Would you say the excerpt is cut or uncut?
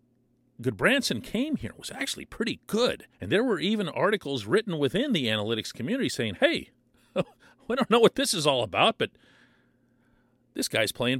cut